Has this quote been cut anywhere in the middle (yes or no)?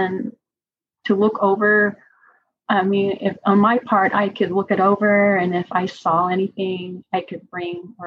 no